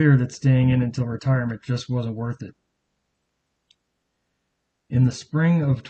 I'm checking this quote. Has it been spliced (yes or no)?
no